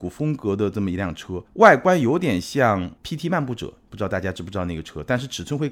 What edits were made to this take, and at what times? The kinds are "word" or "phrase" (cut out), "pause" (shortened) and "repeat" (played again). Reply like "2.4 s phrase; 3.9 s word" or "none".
1.5 s pause; 3.0 s pause